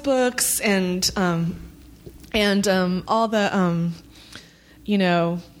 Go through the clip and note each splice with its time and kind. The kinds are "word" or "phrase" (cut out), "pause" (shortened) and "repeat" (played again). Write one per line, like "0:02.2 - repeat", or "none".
none